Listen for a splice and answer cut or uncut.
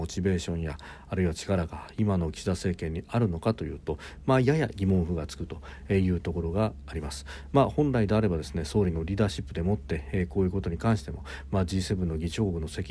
uncut